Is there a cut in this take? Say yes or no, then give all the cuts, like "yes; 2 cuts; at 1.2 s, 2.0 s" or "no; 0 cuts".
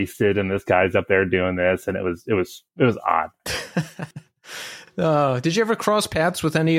yes; 2 cuts; at 2.7 s, 4.1 s